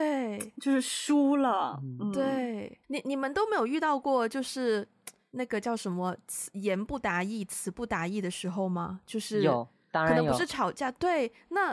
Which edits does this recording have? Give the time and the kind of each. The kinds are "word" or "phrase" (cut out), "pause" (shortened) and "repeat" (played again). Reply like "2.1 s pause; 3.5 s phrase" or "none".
2.8 s pause